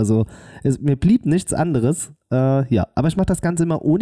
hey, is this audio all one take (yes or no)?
yes